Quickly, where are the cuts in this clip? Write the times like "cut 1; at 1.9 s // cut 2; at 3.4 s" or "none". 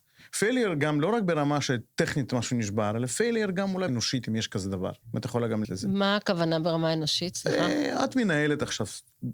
cut 1; at 3.9 s // cut 2; at 5.0 s // cut 3; at 5.6 s

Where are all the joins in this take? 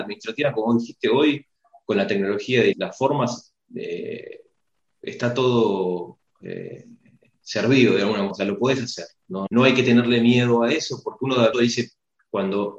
cut 1; at 2.7 s // cut 2; at 8.3 s // cut 3; at 9.5 s // cut 4; at 11.5 s

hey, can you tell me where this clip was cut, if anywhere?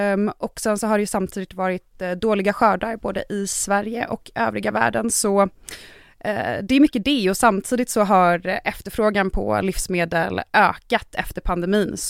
none

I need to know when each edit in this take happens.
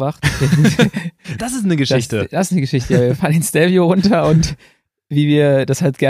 cut 1; at 1.4 s

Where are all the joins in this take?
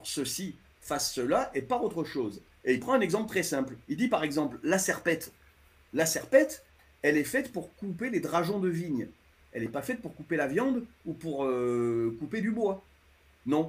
cut 1; at 3.8 s

